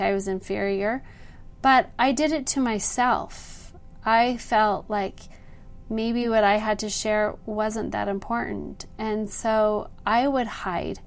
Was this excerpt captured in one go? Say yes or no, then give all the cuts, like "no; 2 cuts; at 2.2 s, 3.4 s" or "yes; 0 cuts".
yes; 0 cuts